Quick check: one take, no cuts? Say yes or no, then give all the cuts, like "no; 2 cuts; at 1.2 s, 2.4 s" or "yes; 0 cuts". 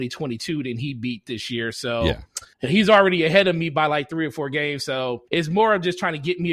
no; 2 cuts; at 2.5 s, 5.3 s